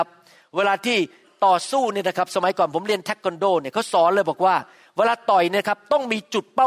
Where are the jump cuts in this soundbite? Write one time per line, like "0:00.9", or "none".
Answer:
none